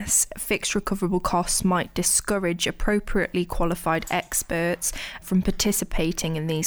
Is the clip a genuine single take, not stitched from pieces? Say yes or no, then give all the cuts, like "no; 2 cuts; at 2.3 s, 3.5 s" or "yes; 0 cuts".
no; 1 cut; at 5.2 s